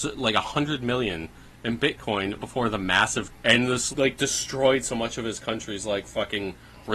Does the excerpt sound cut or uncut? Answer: cut